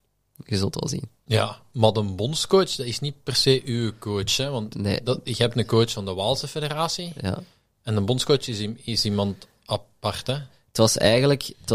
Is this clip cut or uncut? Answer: uncut